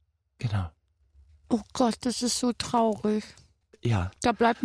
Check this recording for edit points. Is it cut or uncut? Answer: uncut